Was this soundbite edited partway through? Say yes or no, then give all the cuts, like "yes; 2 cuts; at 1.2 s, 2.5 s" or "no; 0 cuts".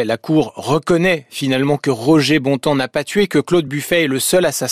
no; 0 cuts